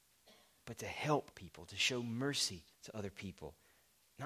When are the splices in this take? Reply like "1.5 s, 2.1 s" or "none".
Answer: 1.3 s, 2.7 s